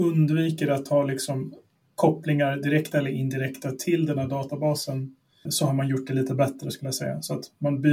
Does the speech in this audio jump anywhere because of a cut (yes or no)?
yes